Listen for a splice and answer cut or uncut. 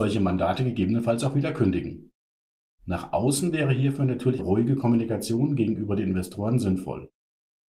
cut